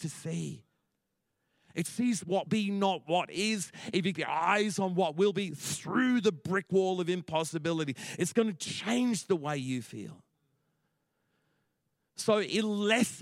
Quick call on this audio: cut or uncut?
cut